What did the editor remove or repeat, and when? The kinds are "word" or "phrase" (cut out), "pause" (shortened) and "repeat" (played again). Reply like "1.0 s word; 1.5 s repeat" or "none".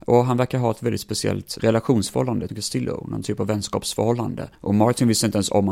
1.6 s word; 2.5 s phrase; 4.5 s pause

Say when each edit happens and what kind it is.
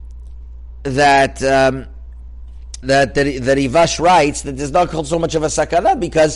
2.8 s word

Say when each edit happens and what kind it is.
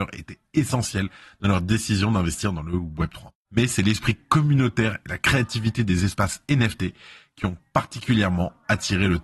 none

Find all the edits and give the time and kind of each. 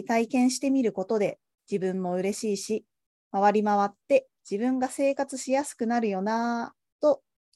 1.6 s pause; 4.4 s pause

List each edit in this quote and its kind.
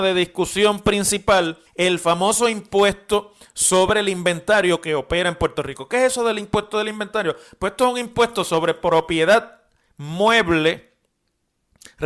1.7 s pause

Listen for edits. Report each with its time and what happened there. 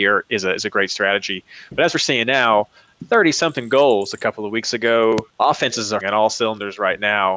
5.3 s pause; 6.0 s word

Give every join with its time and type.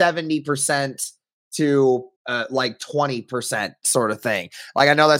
2.2 s pause

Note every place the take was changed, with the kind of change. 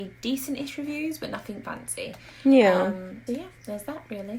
1.6 s word; 3.3 s word

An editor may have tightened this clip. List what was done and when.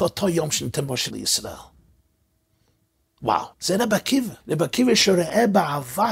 1.1 s word; 3.5 s pause; 4.4 s pause

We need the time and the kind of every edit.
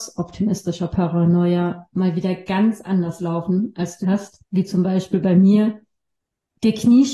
4.0 s phrase; 4.5 s pause

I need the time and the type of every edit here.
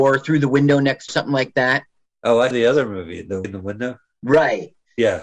1.1 s word; 2.5 s word; 3.4 s word

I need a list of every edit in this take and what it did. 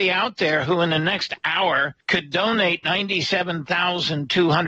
2.0 s pause

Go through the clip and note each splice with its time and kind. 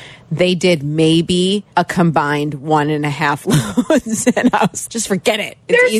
1.7 s pause; 4.9 s word

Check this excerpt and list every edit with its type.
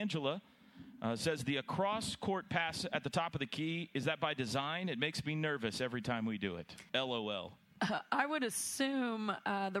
6.9 s pause

